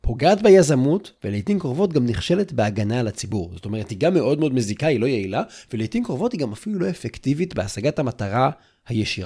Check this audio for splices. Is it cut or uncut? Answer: cut